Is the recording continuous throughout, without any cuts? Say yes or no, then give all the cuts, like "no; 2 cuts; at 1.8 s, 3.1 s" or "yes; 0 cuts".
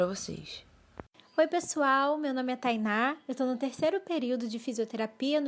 yes; 0 cuts